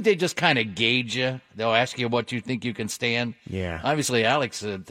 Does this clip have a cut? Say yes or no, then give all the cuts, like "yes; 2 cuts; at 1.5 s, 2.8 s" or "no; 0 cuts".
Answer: no; 0 cuts